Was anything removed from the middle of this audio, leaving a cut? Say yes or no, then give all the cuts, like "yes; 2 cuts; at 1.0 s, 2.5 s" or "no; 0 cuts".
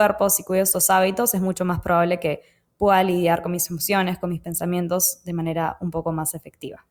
no; 0 cuts